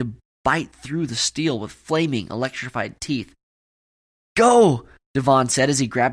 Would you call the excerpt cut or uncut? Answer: uncut